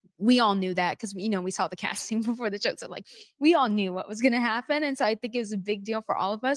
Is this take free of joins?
yes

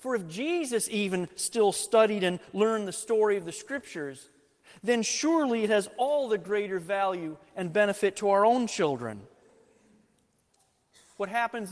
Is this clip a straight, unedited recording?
yes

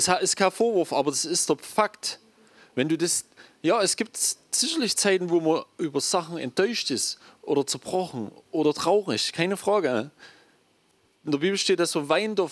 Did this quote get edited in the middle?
no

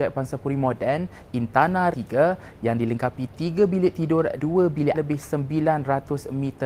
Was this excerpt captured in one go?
no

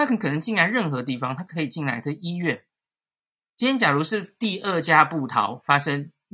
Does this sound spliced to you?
no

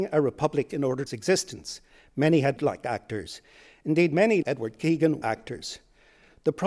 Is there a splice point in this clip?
yes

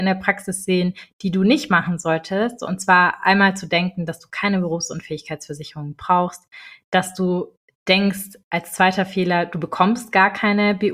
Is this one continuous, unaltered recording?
yes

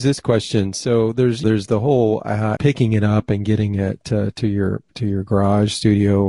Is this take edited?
yes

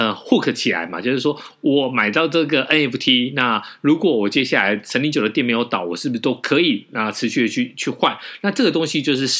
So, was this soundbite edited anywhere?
no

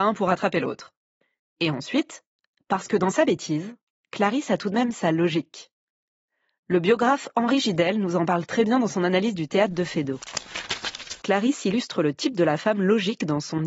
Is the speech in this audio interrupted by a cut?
yes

